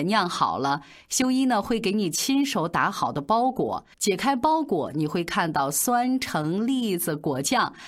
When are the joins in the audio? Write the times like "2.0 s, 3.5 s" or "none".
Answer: 3.9 s